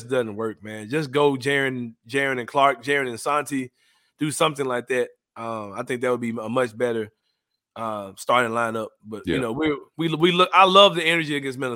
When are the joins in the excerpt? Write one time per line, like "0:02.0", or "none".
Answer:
none